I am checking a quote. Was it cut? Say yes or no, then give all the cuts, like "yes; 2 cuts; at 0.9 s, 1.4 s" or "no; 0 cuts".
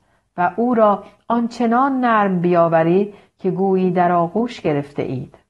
no; 0 cuts